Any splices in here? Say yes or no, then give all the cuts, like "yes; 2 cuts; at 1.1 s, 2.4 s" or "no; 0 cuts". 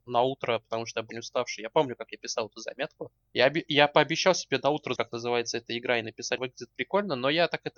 yes; 4 cuts; at 1.1 s, 3.2 s, 5.0 s, 6.4 s